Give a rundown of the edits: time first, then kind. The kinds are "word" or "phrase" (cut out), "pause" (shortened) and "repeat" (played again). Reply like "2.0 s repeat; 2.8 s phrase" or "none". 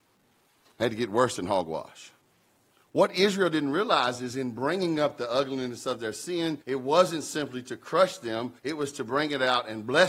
2.3 s pause; 6.6 s pause; 8.6 s pause